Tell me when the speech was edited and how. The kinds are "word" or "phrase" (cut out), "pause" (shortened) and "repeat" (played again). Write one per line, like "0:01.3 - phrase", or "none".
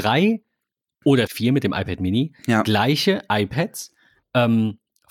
0:01.3 - word